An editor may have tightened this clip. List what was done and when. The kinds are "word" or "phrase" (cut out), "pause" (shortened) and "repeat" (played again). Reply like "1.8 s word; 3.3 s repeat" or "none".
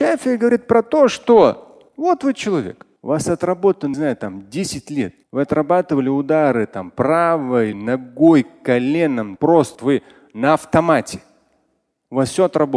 1.9 s pause; 3.0 s pause; 3.9 s phrase; 5.2 s pause; 7.7 s word; 9.4 s word; 9.7 s word